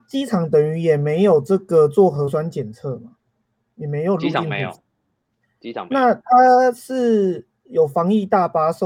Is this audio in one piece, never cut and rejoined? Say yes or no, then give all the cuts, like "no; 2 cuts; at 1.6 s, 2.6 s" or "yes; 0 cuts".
yes; 0 cuts